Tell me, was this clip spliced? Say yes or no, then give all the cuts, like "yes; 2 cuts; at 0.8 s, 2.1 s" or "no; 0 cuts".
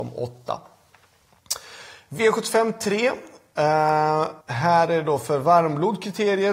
yes; 1 cut; at 4.4 s